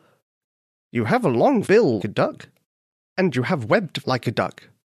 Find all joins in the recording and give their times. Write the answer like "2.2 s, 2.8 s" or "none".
1.6 s, 2.0 s, 4.0 s